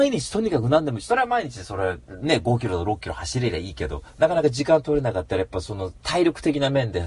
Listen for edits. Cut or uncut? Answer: cut